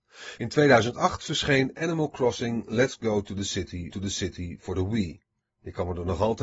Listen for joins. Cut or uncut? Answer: cut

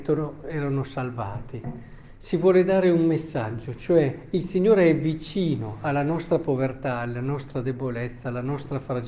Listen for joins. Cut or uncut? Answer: uncut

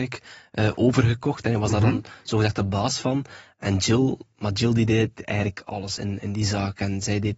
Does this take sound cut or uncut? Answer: uncut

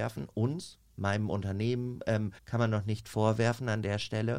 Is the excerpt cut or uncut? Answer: cut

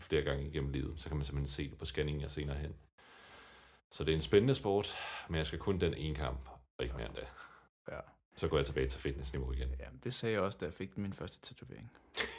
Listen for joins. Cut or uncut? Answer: uncut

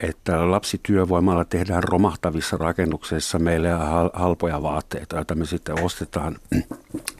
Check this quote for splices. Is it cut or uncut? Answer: uncut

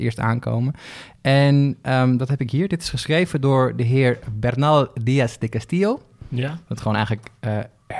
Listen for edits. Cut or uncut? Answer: uncut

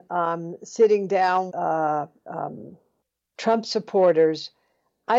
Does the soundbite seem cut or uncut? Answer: cut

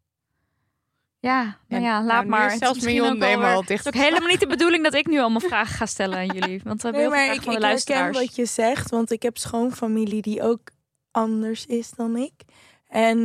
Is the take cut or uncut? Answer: uncut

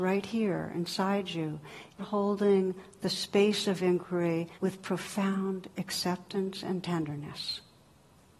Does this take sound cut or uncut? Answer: cut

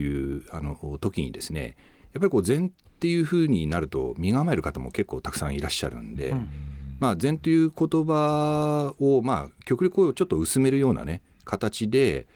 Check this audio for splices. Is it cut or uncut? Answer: uncut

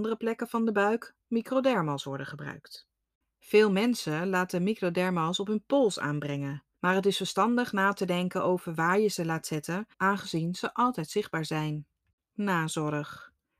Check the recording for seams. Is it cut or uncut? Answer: cut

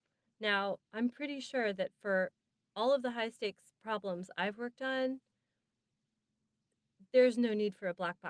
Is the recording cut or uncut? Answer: uncut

